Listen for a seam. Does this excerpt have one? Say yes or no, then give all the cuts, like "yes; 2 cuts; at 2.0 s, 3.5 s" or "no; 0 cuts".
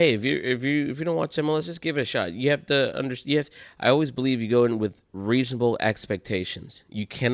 no; 0 cuts